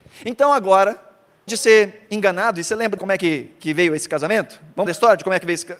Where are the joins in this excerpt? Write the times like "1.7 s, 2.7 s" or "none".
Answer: 1.5 s, 3.0 s, 4.9 s